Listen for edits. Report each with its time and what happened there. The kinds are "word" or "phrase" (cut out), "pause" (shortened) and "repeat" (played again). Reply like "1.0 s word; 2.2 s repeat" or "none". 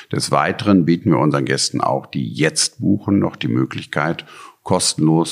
none